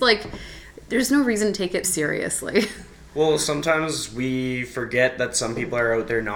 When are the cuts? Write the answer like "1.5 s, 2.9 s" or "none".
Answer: 1.8 s